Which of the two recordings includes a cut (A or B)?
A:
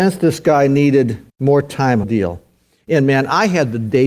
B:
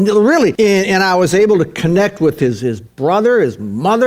A